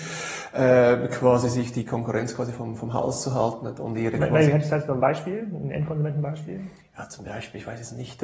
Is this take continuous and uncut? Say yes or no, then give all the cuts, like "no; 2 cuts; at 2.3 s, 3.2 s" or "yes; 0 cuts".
yes; 0 cuts